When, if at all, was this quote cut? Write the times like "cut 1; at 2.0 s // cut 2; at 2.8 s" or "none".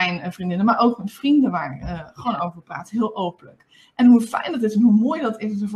none